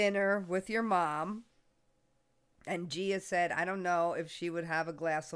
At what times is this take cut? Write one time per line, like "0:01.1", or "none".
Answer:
none